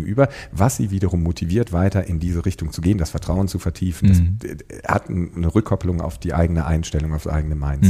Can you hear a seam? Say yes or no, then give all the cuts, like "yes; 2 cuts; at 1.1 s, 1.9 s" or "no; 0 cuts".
no; 0 cuts